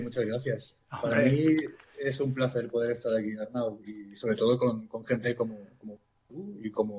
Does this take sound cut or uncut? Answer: uncut